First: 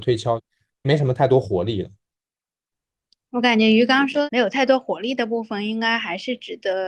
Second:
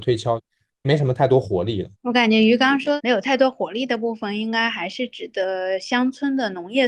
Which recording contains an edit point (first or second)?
second